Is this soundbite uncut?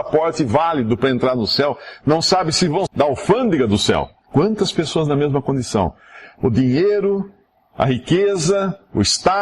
no; 1 cut; at 2.9 s

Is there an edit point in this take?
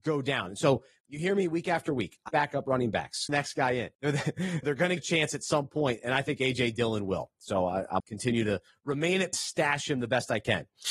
yes; 7 cuts; at 2.3 s, 3.3 s, 3.9 s, 4.6 s, 5.0 s, 8.0 s, 9.3 s

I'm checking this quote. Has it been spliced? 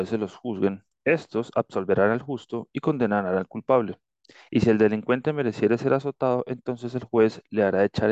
no; 0 cuts

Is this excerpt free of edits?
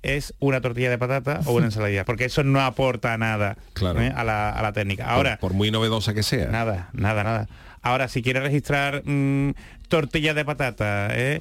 no; 2 cuts; at 2.0 s, 7.2 s

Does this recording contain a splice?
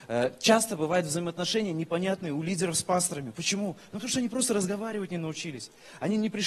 no; 0 cuts

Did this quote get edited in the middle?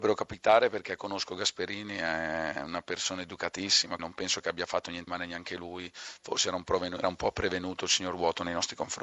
yes; 3 cuts; at 4.0 s, 5.1 s, 7.0 s

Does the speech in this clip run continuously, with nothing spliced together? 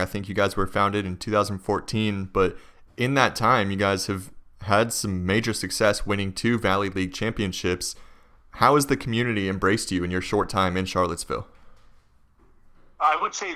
yes; 0 cuts

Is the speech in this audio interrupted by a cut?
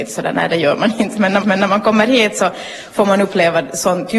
yes; 1 cut; at 1.4 s

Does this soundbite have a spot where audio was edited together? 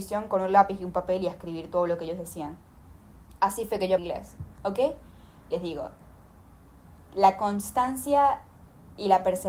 yes; 1 cut; at 4.0 s

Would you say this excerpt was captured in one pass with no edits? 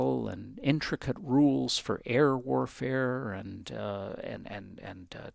yes; 0 cuts

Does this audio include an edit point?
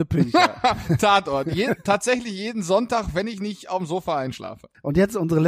no; 0 cuts

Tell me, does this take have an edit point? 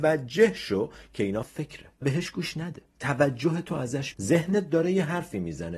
yes; 4 cuts; at 1.4 s, 2.0 s, 2.9 s, 4.1 s

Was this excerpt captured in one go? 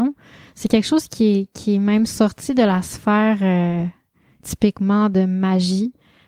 yes; 0 cuts

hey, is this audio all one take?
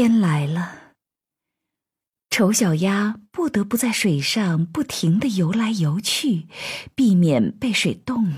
yes; 0 cuts

